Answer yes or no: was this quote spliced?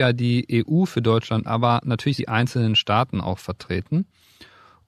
yes